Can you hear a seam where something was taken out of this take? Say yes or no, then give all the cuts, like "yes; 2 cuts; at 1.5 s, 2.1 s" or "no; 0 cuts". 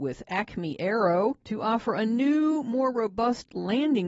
no; 0 cuts